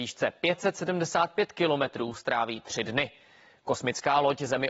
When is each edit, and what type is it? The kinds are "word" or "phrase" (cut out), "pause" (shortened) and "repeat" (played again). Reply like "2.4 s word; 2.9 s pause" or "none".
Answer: none